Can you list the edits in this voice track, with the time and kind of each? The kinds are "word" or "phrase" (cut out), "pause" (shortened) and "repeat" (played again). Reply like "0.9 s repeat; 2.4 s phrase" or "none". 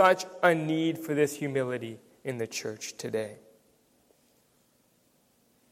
none